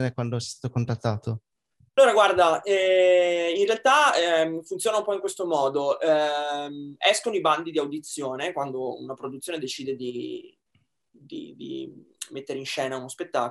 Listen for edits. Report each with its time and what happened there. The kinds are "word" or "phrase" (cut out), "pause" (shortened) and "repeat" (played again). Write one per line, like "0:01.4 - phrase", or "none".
none